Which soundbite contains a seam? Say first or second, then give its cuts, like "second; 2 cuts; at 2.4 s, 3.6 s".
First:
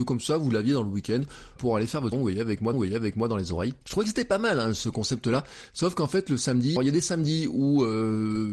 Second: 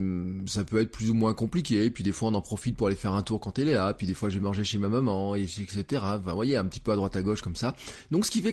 first; 5 cuts; at 1.6 s, 2.1 s, 2.7 s, 3.8 s, 6.8 s